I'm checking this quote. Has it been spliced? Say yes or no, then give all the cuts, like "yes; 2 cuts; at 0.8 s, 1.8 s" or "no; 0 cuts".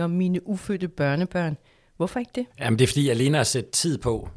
yes; 1 cut; at 2.5 s